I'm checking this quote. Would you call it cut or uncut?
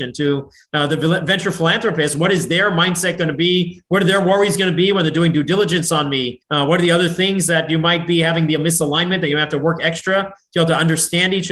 cut